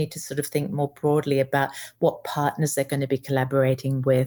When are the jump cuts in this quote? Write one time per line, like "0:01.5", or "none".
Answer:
none

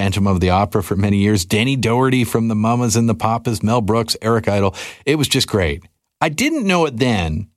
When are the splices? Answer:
none

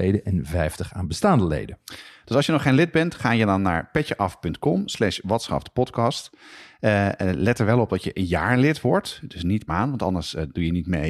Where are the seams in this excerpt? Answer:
0:09.7

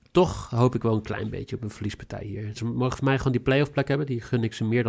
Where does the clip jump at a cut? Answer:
none

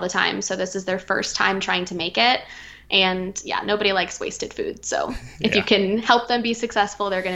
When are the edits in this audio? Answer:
none

